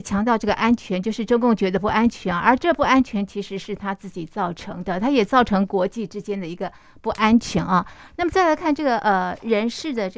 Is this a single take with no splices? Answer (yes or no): yes